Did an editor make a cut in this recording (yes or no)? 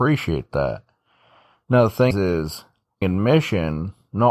yes